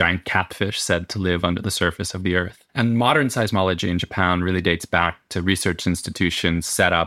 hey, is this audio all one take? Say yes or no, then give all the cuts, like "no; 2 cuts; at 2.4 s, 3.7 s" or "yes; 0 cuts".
no; 1 cut; at 2.7 s